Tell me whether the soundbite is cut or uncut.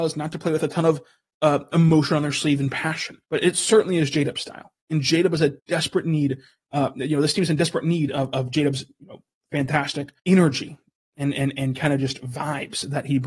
cut